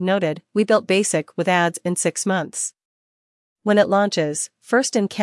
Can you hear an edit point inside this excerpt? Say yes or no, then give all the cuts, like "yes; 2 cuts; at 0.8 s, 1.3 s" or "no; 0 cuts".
no; 0 cuts